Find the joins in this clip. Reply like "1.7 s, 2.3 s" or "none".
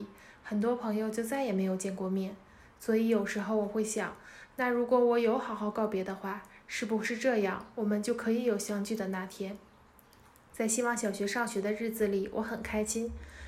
none